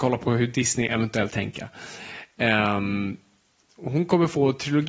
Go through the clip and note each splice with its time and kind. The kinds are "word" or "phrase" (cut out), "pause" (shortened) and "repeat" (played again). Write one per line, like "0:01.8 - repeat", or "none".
0:01.3 - word